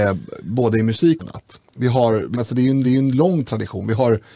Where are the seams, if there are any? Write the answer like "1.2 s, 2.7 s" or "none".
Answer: 1.2 s, 1.7 s, 2.3 s, 2.8 s